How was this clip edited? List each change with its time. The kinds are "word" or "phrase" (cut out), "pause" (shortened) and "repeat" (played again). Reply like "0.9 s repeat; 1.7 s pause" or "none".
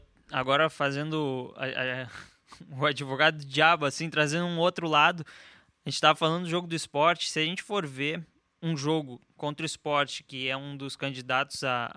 none

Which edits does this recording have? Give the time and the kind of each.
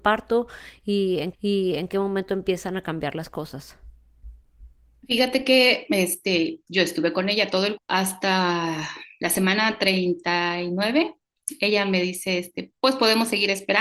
1.3 s repeat; 6.7 s word; 7.8 s word; 12.8 s pause

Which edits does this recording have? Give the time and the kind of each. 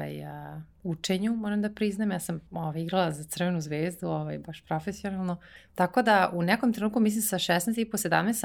2.5 s pause; 5.6 s pause

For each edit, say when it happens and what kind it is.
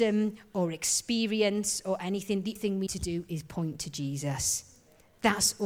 2.6 s word; 2.9 s word

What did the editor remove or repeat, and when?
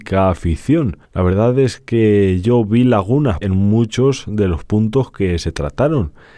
1.0 s pause; 3.4 s word

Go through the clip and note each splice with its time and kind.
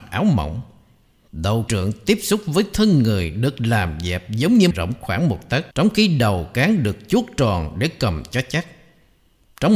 1.7 s word; 4.7 s phrase; 5.7 s pause

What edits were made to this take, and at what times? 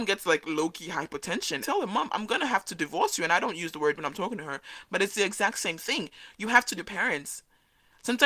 1.6 s phrase; 4.0 s word; 6.8 s word

